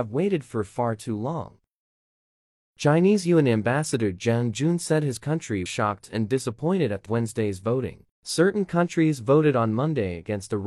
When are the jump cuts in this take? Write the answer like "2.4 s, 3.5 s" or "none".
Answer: 5.7 s, 7.1 s, 8.1 s

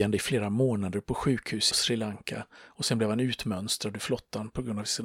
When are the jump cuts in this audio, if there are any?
1.7 s

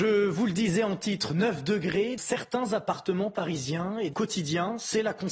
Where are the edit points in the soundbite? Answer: 2.2 s, 4.1 s

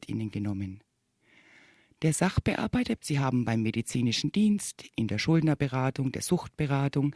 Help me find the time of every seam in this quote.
3.0 s

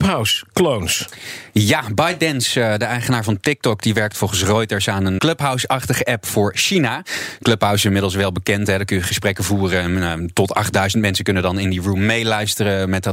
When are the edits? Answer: 5.2 s

